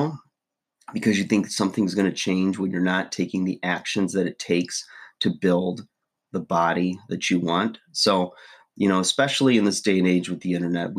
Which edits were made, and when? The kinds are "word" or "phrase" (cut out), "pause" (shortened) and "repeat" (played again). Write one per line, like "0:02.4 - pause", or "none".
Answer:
none